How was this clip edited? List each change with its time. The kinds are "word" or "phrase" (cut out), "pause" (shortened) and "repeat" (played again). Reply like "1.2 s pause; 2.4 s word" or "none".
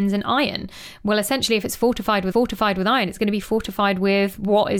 2.3 s repeat

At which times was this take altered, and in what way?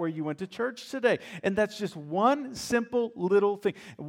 none

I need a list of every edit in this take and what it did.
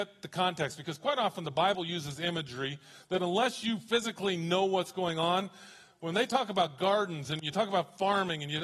none

